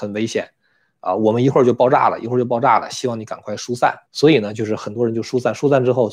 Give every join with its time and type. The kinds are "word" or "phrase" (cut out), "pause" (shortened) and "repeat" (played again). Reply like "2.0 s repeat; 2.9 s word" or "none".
4.0 s pause